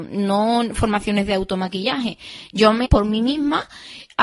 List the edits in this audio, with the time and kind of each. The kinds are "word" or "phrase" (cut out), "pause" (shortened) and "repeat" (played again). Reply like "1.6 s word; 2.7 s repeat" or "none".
2.8 s word